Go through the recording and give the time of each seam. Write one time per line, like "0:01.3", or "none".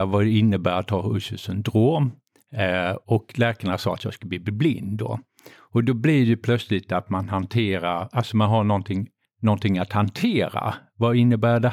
0:05.5
0:09.2

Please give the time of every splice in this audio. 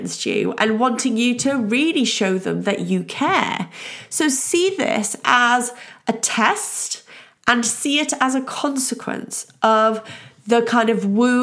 none

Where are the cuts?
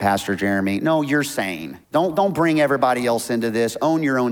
0:01.8

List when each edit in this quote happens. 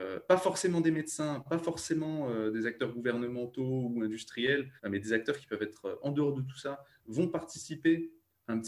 0:04.8

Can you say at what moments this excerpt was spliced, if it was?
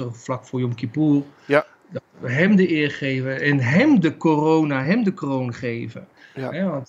none

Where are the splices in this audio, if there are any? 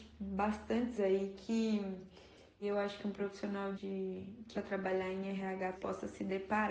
0:01.0
0:02.6
0:03.7
0:04.5
0:05.7

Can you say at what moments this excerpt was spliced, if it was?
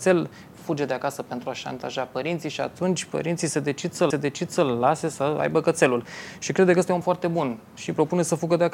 0:04.1
0:07.0

